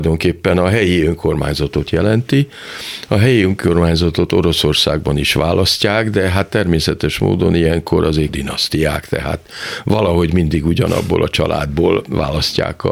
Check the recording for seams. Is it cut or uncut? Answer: cut